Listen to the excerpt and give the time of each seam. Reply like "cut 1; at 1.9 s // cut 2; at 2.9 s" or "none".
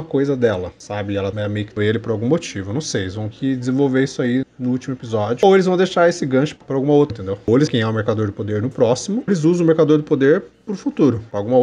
cut 1; at 1.3 s // cut 2; at 1.8 s // cut 3; at 3.3 s // cut 4; at 4.4 s // cut 5; at 6.6 s // cut 6; at 7.1 s // cut 7; at 7.7 s // cut 8; at 9.3 s